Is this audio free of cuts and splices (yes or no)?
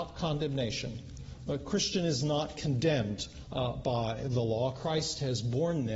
yes